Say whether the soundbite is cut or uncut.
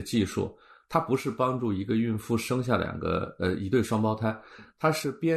uncut